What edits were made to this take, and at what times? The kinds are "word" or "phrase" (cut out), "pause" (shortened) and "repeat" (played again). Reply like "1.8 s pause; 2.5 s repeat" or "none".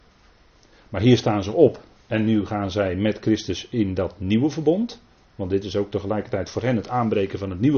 none